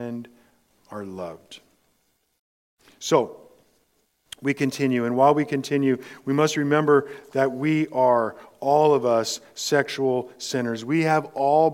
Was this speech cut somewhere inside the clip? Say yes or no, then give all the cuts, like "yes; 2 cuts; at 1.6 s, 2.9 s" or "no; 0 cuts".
no; 0 cuts